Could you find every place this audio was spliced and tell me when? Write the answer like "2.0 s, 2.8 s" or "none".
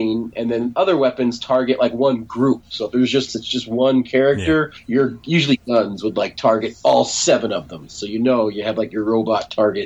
3.3 s